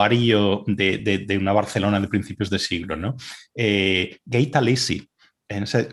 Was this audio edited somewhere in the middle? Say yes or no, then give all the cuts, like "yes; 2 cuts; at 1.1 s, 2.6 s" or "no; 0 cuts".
no; 0 cuts